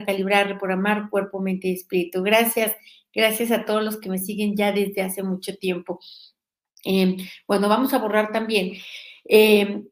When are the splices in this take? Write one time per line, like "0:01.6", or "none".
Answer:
none